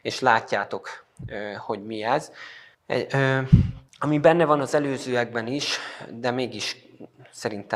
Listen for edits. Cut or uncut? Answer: cut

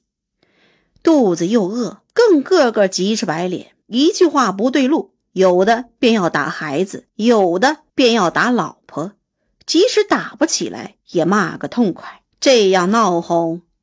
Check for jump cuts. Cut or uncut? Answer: cut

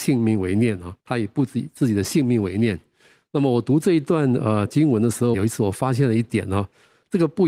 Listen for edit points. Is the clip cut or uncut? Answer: cut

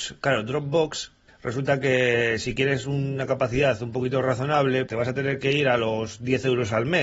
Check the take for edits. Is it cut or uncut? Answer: cut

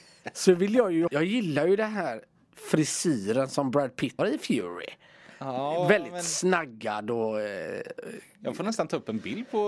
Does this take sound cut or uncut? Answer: cut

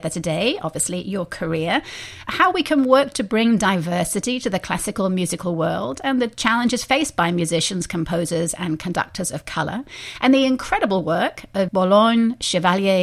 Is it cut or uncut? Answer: cut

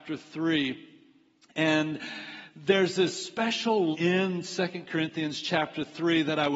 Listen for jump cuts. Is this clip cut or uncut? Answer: cut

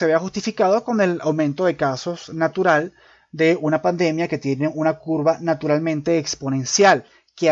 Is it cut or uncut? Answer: uncut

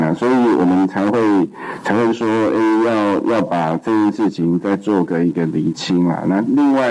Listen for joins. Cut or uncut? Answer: uncut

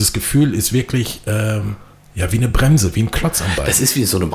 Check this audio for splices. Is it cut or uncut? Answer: uncut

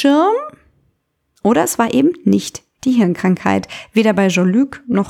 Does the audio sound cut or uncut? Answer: uncut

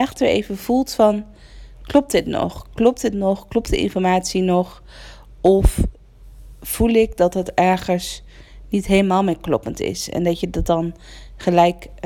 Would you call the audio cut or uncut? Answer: uncut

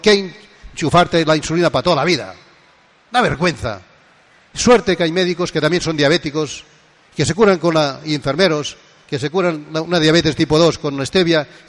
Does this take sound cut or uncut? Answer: uncut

